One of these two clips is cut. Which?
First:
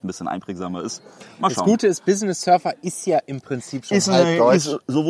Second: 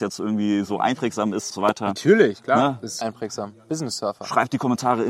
second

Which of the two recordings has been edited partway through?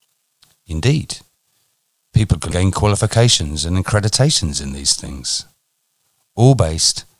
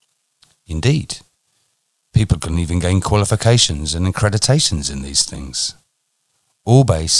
first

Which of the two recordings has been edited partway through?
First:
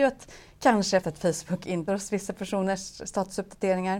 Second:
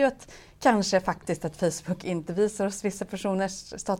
first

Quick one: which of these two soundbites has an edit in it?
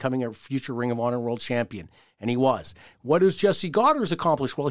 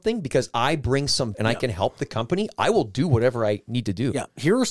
second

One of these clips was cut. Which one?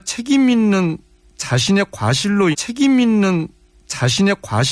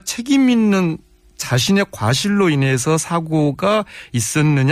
first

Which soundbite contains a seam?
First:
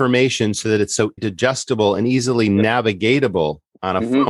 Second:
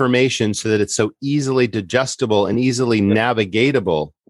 first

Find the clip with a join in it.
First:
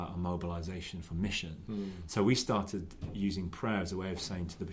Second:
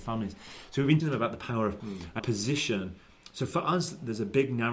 second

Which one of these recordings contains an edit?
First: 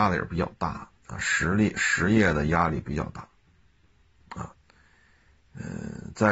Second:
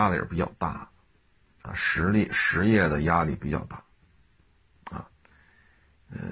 first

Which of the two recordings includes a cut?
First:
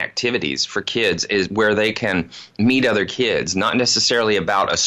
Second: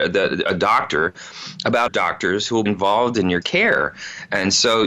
second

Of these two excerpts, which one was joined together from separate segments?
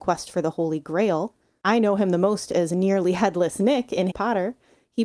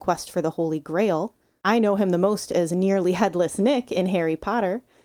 first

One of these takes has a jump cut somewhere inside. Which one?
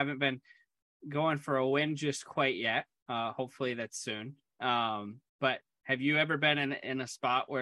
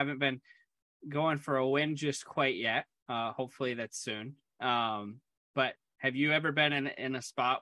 first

